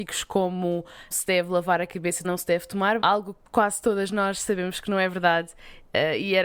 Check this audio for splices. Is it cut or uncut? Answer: cut